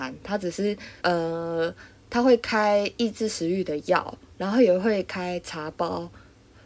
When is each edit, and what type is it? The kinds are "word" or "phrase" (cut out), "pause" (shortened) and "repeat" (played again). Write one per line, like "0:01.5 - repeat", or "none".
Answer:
0:01.0 - pause